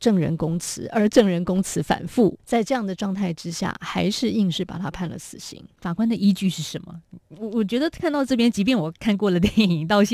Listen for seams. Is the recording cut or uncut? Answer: cut